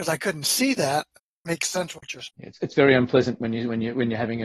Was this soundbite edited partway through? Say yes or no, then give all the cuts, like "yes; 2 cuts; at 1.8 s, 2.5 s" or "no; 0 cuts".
no; 0 cuts